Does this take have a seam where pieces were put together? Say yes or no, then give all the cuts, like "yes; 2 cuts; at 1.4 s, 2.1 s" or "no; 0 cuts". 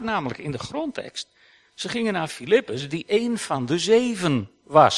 no; 0 cuts